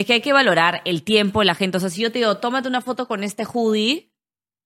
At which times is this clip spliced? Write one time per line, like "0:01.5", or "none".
none